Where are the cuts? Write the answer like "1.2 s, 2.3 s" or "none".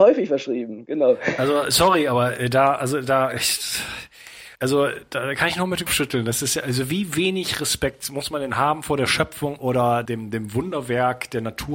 4.6 s, 5.9 s, 10.1 s